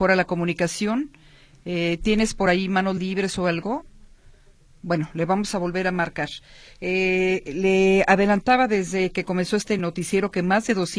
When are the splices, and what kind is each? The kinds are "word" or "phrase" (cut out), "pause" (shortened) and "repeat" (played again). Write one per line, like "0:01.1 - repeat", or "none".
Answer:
none